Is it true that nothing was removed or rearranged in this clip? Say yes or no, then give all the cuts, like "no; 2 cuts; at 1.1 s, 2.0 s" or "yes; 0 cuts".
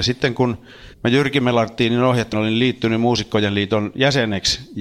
no; 2 cuts; at 0.9 s, 2.3 s